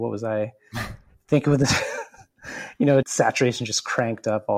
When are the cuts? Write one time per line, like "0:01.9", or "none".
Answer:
0:03.0